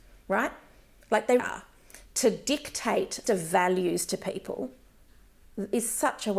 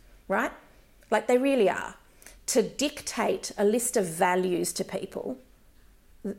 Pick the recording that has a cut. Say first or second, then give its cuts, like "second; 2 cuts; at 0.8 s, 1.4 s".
first; 2 cuts; at 1.4 s, 3.2 s